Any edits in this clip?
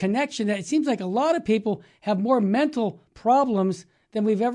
no; 0 cuts

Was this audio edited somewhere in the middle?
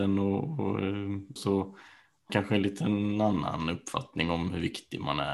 yes; 2 cuts; at 1.4 s, 2.3 s

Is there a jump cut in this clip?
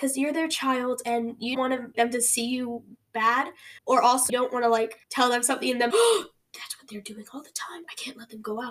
yes; 6 cuts; at 1.5 s, 1.9 s, 3.8 s, 4.3 s, 5.0 s, 5.9 s

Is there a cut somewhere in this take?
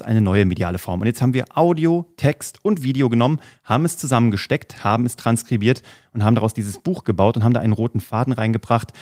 no; 0 cuts

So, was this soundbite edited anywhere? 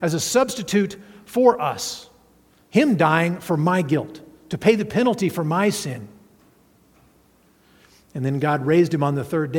no; 0 cuts

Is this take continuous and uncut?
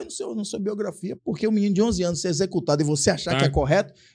no; 1 cut; at 1.2 s

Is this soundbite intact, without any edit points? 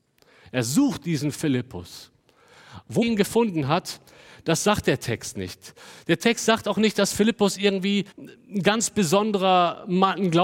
no; 2 cuts; at 3.0 s, 8.1 s

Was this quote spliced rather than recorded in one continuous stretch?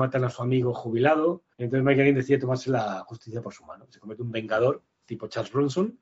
yes; 1 cut; at 1.5 s

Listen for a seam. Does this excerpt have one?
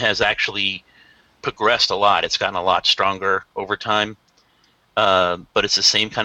no; 0 cuts

